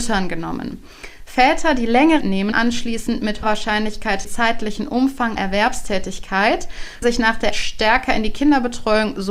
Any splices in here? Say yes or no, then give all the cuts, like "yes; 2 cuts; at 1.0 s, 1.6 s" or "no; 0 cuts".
yes; 7 cuts; at 2.2 s, 2.5 s, 3.4 s, 4.2 s, 5.4 s, 7.0 s, 7.5 s